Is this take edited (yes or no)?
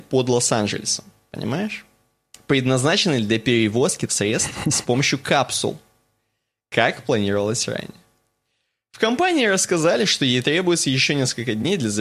yes